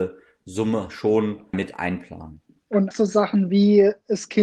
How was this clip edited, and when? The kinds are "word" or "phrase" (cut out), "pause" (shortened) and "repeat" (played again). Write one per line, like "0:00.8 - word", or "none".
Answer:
0:01.5 - word
0:02.9 - word